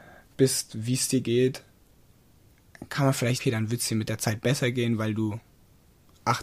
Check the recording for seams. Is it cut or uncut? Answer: cut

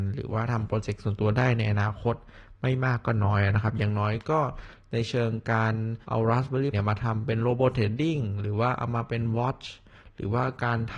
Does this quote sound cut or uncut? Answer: cut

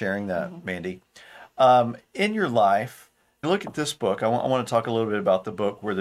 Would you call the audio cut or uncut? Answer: cut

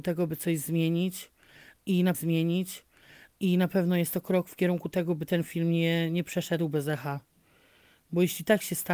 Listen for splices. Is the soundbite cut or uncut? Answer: cut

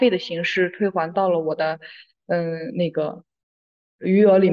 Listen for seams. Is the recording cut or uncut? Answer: uncut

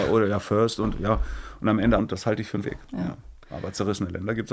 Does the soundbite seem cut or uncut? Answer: cut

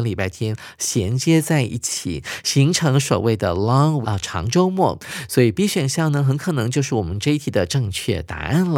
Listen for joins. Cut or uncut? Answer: cut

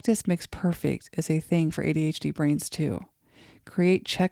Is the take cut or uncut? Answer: uncut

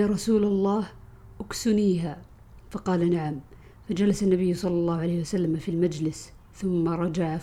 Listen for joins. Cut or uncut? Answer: uncut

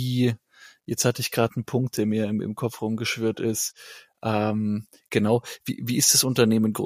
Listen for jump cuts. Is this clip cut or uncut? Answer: uncut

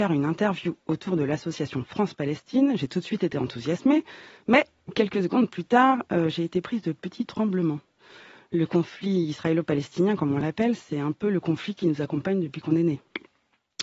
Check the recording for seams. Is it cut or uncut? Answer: uncut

